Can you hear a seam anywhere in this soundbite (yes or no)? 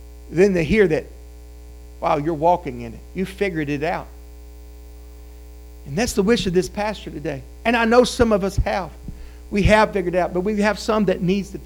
no